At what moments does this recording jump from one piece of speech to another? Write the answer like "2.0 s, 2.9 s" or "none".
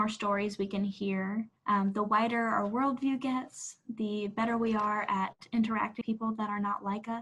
1.6 s, 6.0 s